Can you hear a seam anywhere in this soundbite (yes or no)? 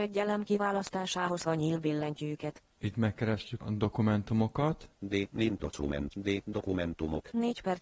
yes